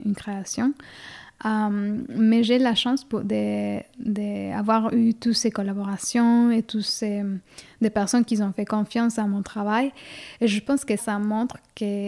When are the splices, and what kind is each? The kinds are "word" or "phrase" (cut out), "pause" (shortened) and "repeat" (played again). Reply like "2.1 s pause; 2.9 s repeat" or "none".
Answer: 11.0 s word